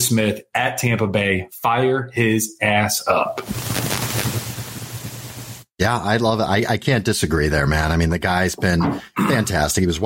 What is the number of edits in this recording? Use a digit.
0